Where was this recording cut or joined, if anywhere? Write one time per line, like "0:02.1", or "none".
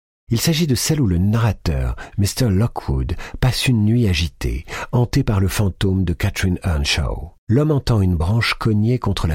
0:07.4